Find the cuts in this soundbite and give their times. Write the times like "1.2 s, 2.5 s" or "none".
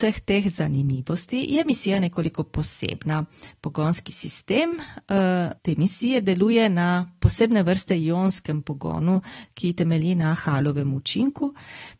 5.6 s